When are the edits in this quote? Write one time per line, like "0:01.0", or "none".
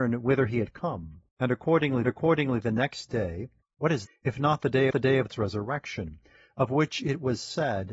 0:01.3
0:02.0
0:03.6
0:04.1
0:04.9
0:05.3